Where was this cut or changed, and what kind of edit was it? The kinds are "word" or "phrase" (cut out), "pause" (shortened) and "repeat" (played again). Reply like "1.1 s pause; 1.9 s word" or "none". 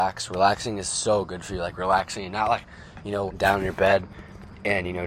2.3 s word; 3.3 s word